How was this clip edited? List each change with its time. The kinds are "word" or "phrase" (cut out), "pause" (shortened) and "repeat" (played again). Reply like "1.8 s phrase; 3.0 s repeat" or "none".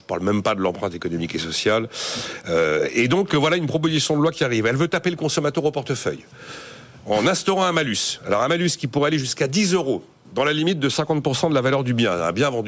none